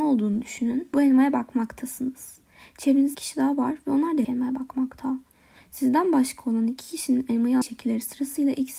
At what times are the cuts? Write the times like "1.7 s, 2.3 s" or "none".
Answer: 0.9 s, 3.1 s, 4.2 s, 7.6 s